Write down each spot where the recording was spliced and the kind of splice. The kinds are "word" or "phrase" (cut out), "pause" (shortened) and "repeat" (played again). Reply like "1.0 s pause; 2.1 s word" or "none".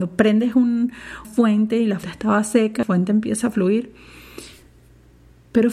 1.2 s phrase; 2.0 s word; 2.8 s phrase